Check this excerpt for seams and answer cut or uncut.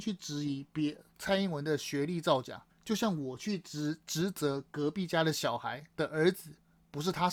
cut